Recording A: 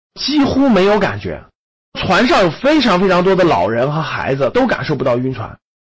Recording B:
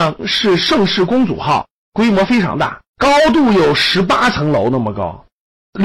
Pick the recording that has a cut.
B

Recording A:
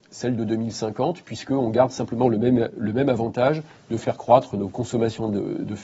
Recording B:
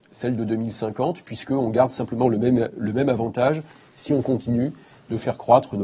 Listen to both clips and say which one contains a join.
A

